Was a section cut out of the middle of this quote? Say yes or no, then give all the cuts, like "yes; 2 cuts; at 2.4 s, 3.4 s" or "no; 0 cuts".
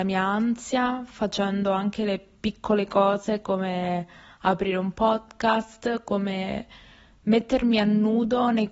no; 0 cuts